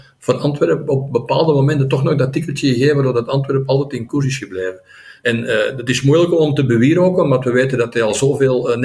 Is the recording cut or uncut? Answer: uncut